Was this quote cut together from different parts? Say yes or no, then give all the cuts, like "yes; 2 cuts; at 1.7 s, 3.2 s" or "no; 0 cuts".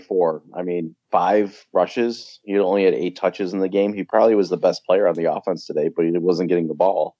yes; 1 cut; at 1.0 s